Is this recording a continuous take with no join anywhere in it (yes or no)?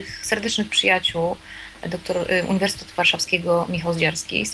yes